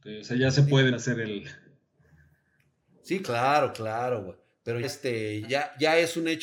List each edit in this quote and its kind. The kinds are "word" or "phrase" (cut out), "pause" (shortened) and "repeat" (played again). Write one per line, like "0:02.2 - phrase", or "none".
0:00.9 - word
0:03.2 - word
0:04.8 - word
0:05.4 - word